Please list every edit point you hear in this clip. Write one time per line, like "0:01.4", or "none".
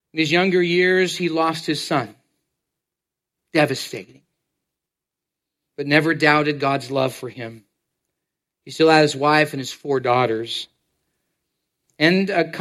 none